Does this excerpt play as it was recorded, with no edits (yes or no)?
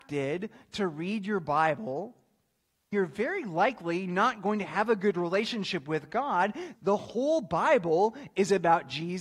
no